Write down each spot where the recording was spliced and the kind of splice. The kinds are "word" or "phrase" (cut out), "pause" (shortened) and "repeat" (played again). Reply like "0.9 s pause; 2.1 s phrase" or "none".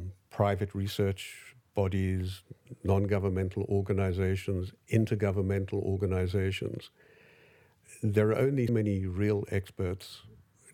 4.8 s pause; 8.7 s word

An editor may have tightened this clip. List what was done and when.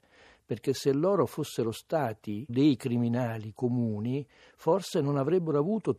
2.5 s word

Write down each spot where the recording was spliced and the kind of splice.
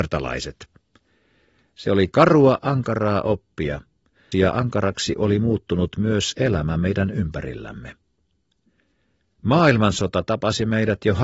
4.3 s phrase

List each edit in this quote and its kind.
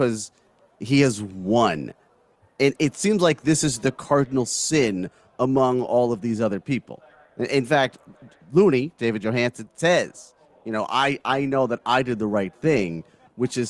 none

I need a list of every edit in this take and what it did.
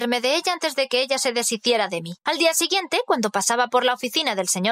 2.2 s pause

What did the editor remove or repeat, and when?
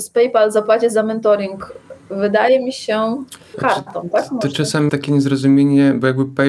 3.5 s word; 4.9 s word

